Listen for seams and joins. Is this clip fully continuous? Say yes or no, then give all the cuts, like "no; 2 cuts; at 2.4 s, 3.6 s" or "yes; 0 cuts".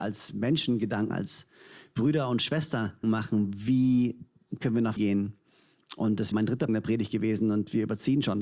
no; 5 cuts; at 1.1 s, 3.0 s, 5.0 s, 6.3 s, 6.7 s